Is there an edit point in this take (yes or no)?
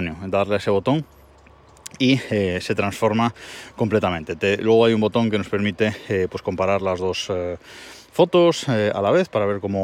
no